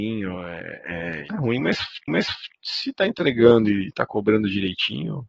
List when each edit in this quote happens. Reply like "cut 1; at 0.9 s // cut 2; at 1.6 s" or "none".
cut 1; at 1.3 s // cut 2; at 2.1 s